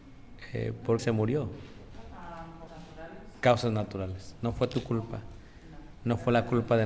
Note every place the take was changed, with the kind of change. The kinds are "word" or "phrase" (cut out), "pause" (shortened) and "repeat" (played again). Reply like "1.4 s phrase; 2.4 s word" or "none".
1.0 s word; 2.7 s word